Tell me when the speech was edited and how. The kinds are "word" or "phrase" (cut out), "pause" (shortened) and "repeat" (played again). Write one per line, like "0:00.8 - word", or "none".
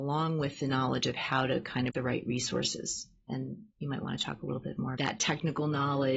0:01.9 - phrase
0:03.7 - pause
0:05.0 - word